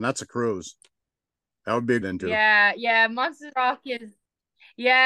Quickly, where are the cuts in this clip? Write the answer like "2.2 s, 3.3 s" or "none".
1.0 s, 2.0 s, 3.5 s